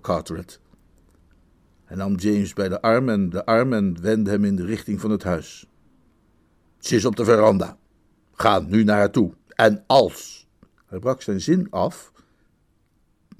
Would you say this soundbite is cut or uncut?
cut